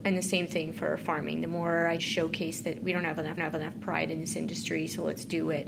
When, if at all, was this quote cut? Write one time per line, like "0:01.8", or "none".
0:02.0
0:03.4